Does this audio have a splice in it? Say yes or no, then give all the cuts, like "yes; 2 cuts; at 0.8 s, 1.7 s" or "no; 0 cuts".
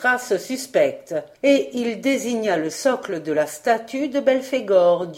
yes; 1 cut; at 1.3 s